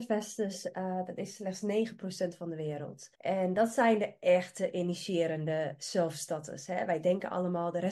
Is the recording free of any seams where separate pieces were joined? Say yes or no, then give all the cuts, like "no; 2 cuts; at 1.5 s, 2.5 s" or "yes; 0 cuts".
no; 1 cut; at 3.1 s